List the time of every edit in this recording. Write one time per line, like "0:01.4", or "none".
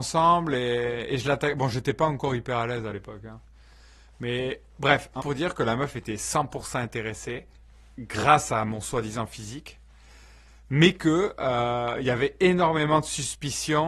0:05.2